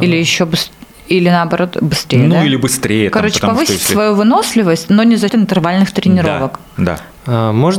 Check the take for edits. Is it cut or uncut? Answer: cut